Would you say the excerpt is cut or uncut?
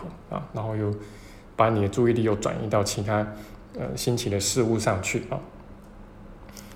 uncut